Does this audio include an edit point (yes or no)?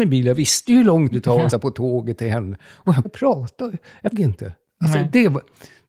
yes